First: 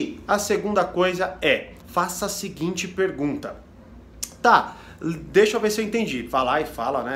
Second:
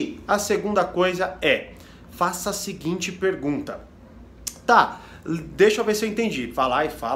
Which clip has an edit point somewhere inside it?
first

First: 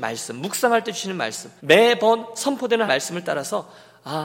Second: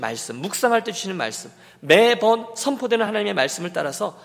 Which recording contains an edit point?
first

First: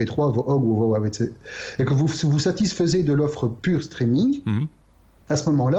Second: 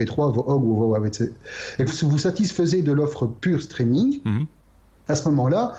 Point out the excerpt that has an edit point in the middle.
second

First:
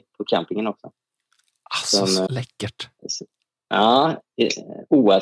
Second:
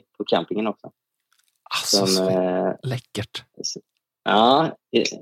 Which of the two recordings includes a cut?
first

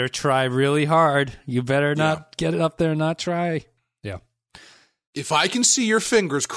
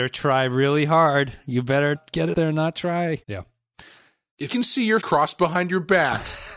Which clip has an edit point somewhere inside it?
second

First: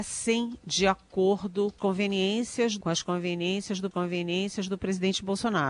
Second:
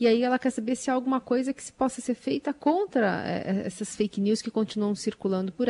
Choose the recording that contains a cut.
first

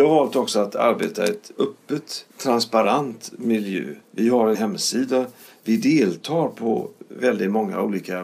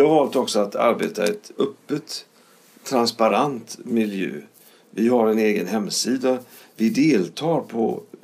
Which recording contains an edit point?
first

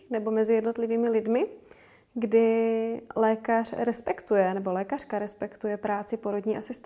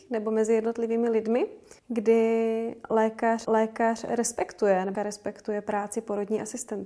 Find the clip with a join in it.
second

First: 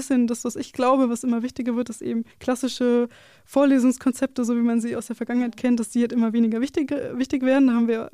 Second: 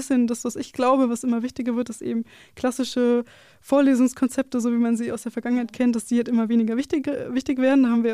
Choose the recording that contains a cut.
first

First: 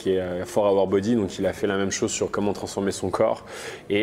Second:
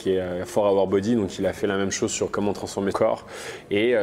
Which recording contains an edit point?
second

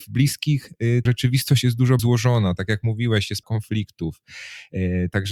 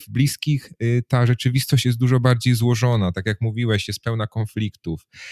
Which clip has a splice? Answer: first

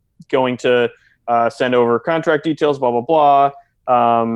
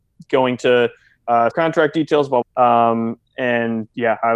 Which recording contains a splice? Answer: second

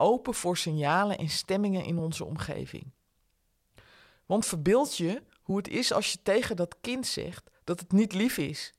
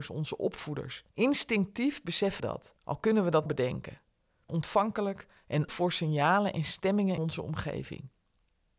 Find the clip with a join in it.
second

